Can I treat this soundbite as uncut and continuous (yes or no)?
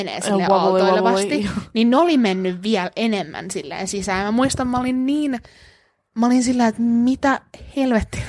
yes